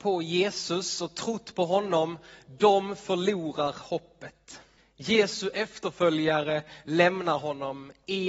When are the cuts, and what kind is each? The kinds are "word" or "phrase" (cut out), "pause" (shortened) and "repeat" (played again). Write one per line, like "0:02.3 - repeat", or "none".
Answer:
0:04.8 - pause